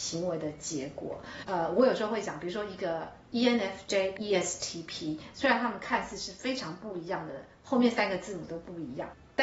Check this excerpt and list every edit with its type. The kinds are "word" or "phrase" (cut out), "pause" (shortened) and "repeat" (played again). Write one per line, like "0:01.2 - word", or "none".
0:04.2 - word

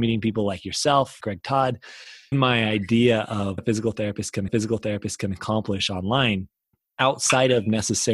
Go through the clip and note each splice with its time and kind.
0:01.2 - word
0:02.3 - phrase
0:03.6 - word
0:04.5 - repeat
0:06.7 - pause

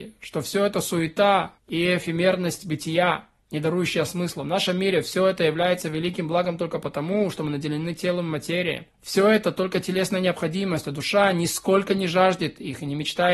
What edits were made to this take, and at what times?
0:01.6 - pause
0:08.9 - pause

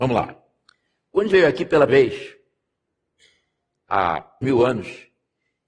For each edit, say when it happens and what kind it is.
0:01.3 - word
0:01.9 - word
0:04.4 - phrase

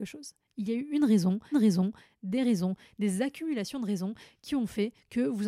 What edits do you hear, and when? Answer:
0:01.5 - repeat

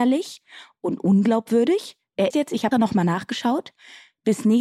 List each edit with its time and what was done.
0:02.3 - word
0:02.7 - word

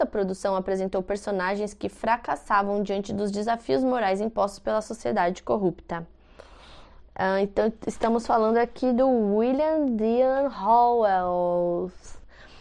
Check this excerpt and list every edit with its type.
none

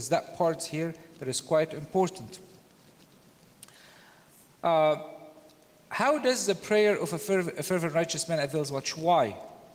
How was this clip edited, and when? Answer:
none

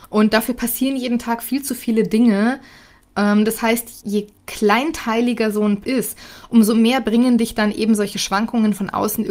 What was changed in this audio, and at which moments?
0:04.0 - word
0:05.8 - word

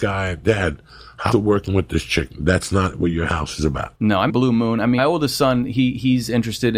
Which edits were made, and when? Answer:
0:01.3 - word
0:04.0 - word
0:04.3 - phrase
0:05.0 - word

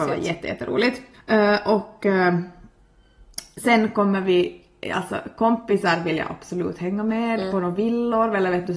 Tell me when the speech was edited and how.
0:01.1 - pause

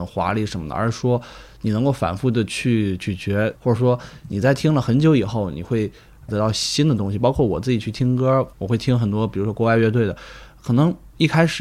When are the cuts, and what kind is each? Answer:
0:03.5 - phrase
0:06.3 - word

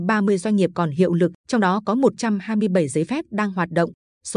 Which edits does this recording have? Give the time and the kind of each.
0:01.4 - pause

